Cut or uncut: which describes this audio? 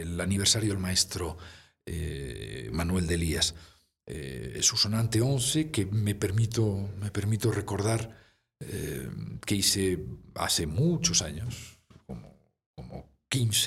uncut